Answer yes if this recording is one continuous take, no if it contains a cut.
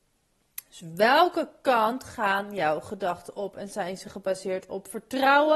yes